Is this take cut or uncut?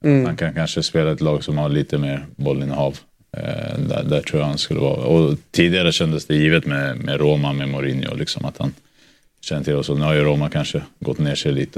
uncut